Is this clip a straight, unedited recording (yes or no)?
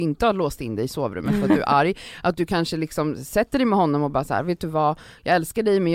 yes